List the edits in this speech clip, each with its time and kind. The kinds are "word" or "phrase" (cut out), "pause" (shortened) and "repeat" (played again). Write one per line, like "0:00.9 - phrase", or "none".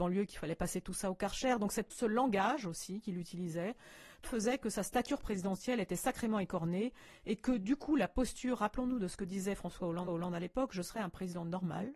0:01.9 - word
0:04.2 - word
0:10.1 - repeat